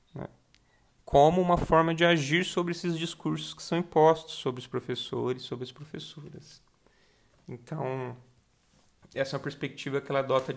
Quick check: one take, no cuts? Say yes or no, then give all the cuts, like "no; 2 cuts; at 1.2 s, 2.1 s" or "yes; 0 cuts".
yes; 0 cuts